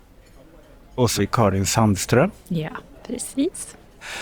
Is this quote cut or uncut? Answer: cut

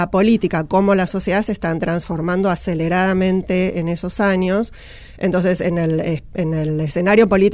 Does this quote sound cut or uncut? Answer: uncut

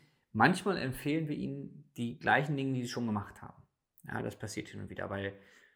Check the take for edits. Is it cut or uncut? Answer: uncut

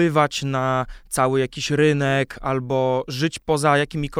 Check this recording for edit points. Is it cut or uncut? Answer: uncut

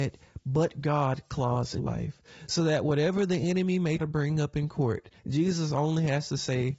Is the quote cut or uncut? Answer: cut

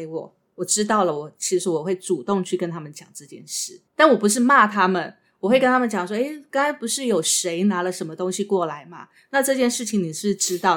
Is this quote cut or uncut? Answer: cut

